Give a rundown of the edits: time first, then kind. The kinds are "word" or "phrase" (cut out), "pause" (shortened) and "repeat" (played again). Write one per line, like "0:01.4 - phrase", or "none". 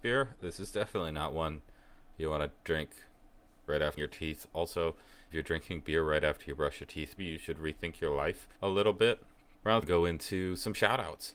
0:02.6 - pause
0:04.0 - word
0:05.3 - word
0:07.2 - word
0:08.5 - pause
0:09.8 - phrase